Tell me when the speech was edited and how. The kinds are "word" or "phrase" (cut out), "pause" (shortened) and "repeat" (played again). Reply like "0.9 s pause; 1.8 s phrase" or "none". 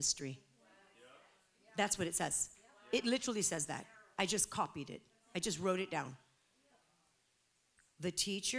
none